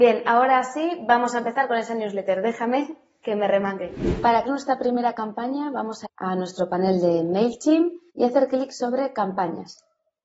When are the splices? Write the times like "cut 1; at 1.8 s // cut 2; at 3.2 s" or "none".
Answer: cut 1; at 4.4 s // cut 2; at 6.0 s // cut 3; at 8.1 s